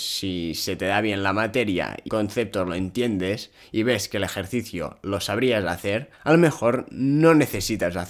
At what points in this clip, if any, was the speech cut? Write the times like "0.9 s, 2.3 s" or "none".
2.1 s, 6.1 s